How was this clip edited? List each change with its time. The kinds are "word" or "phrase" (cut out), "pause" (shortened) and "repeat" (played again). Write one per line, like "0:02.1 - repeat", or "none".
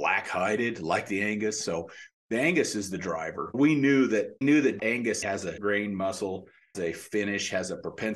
0:03.5 - word
0:04.4 - word
0:04.8 - word
0:05.2 - word
0:05.6 - word
0:06.7 - word